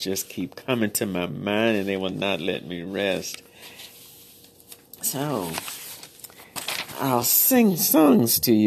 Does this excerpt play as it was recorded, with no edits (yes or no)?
yes